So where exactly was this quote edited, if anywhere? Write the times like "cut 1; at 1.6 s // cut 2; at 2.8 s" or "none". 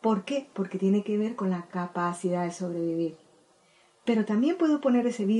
none